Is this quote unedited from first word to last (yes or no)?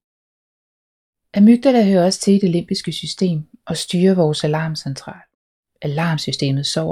yes